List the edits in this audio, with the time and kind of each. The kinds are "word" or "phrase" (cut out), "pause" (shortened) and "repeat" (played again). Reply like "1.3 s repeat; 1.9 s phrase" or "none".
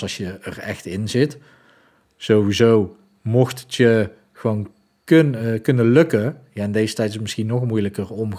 none